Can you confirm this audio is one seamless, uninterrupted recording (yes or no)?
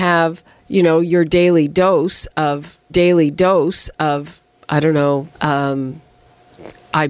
no